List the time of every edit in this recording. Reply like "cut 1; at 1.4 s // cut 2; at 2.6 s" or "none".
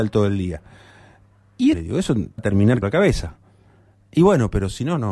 cut 1; at 1.7 s // cut 2; at 2.4 s // cut 3; at 2.8 s